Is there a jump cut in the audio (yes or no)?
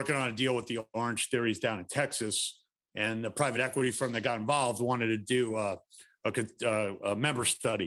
no